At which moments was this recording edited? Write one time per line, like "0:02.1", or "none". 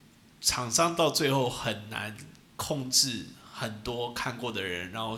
0:02.4